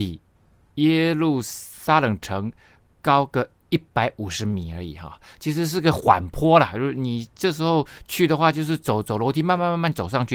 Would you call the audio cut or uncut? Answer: uncut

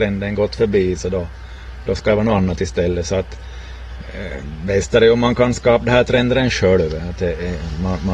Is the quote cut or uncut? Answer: uncut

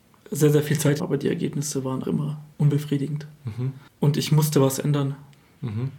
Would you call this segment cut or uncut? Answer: cut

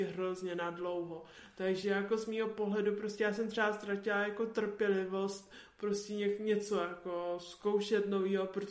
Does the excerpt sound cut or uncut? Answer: uncut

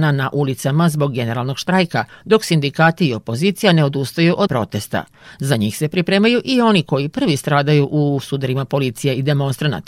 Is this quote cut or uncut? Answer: cut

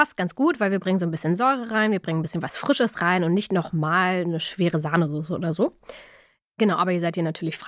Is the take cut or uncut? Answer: uncut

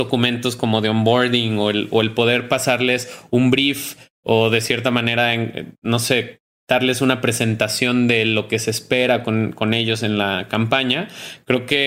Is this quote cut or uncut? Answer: uncut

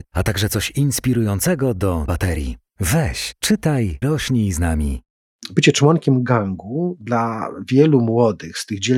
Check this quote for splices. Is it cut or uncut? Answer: cut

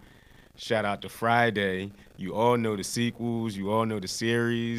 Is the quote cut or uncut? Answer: uncut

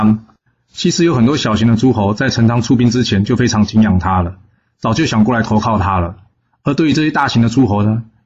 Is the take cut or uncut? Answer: uncut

